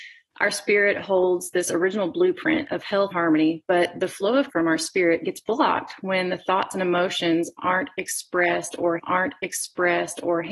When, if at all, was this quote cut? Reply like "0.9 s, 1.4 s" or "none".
3.1 s, 4.5 s, 9.0 s